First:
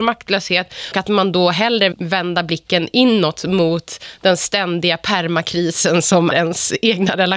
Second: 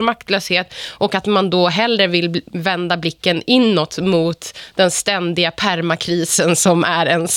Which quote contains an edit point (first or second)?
first